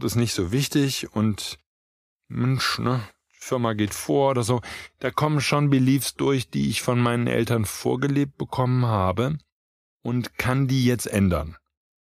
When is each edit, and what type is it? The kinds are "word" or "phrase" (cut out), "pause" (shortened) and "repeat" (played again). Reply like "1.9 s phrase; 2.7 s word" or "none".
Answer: none